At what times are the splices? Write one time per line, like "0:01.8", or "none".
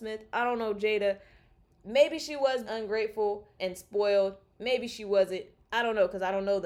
0:02.7
0:03.6